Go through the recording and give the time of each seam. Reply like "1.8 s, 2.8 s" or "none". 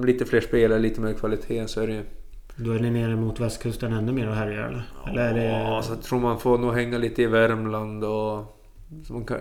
none